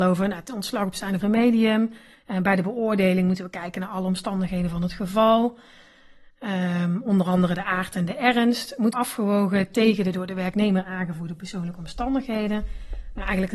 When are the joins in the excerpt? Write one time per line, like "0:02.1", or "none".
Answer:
0:01.2
0:02.1
0:08.9